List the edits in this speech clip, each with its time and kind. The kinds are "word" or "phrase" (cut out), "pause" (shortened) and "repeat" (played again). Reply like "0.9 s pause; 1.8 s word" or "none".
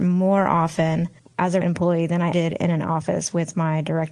1.2 s pause; 1.6 s word; 2.3 s word